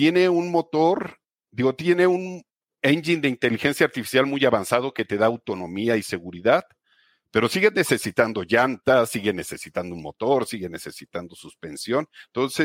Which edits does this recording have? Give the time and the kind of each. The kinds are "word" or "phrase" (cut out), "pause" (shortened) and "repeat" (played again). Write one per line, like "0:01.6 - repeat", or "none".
none